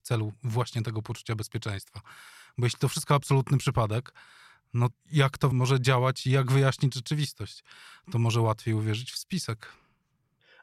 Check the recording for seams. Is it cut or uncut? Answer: cut